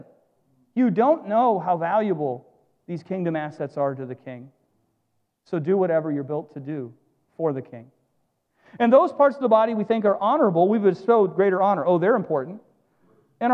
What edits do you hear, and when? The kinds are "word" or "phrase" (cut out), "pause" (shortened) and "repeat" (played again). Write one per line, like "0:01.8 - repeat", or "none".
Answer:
none